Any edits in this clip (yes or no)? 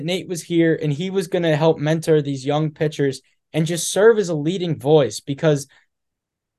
no